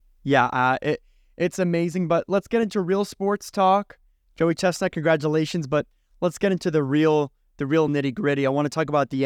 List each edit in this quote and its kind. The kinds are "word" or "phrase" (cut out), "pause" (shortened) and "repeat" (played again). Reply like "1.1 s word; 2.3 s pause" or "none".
none